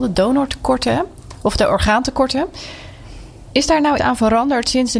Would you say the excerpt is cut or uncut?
cut